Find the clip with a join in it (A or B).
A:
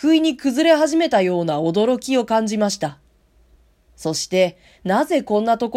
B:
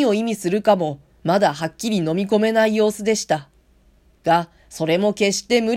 B